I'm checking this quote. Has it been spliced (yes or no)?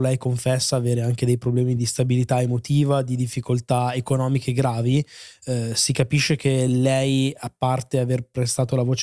no